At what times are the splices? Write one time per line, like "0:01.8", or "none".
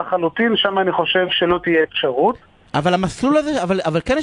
none